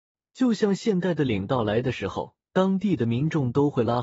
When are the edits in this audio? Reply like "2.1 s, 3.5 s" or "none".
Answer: 2.5 s